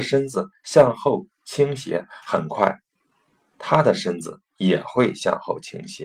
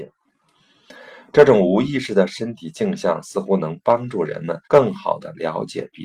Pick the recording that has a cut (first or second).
second